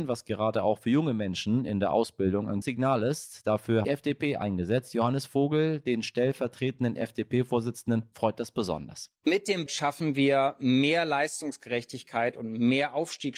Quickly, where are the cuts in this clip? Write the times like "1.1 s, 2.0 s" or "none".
2.6 s, 3.8 s, 9.2 s, 9.7 s